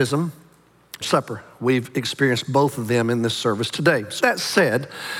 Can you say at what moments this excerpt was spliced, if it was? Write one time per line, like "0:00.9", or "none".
0:01.0
0:04.2